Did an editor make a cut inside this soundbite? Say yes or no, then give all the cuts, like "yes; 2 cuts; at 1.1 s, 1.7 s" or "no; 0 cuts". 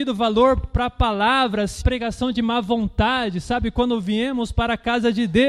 yes; 1 cut; at 1.8 s